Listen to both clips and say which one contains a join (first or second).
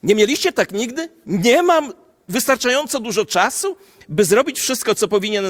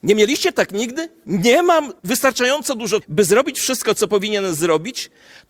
second